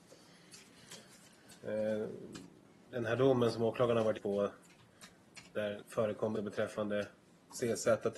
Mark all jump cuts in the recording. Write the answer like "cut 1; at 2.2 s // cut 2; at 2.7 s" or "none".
cut 1; at 4.2 s // cut 2; at 5.8 s // cut 3; at 6.3 s